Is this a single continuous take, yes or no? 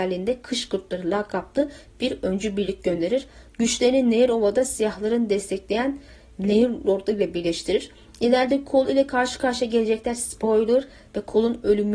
yes